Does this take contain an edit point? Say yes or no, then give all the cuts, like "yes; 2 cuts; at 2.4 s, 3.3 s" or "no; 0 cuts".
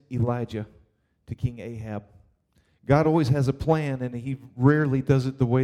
no; 0 cuts